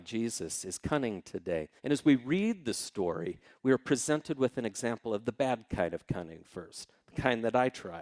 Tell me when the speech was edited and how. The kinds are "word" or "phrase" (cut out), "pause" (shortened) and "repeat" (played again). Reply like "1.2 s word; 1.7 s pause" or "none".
1.8 s pause